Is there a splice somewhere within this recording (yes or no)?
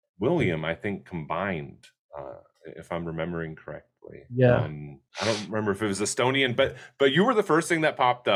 yes